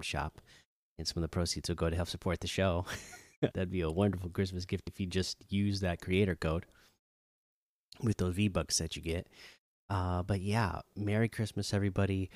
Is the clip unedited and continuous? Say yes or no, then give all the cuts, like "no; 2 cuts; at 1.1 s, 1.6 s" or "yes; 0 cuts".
no; 2 cuts; at 3.5 s, 4.9 s